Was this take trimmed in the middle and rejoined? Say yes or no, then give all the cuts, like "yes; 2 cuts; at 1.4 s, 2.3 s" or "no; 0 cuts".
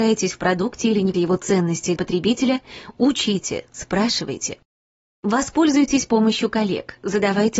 yes; 2 cuts; at 1.1 s, 2.0 s